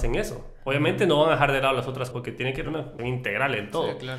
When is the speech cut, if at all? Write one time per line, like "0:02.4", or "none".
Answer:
0:02.1
0:02.6
0:03.0